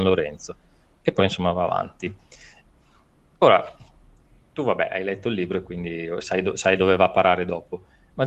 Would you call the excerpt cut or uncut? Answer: uncut